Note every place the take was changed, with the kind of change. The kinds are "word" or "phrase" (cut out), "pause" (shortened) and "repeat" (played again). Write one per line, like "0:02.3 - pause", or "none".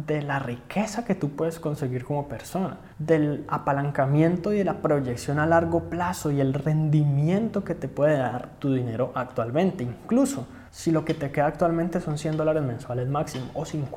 0:02.9 - pause
0:10.7 - pause